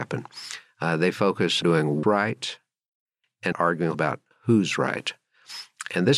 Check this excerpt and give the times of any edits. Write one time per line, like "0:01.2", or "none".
0:01.6
0:02.0
0:03.5
0:03.9